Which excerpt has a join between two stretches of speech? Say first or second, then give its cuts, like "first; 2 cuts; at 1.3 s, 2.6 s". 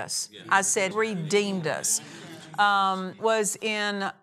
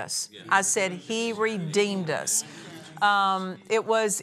first; 2 cuts; at 0.9 s, 3.2 s